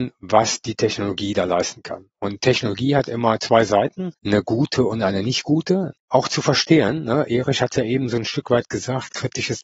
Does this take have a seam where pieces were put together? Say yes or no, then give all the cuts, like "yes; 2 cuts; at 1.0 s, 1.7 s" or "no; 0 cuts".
yes; 2 cuts; at 4.2 s, 6.0 s